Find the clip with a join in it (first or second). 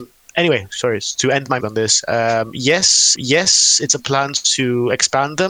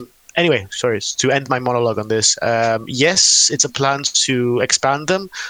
first